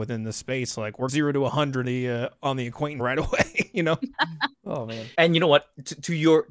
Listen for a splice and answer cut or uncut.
cut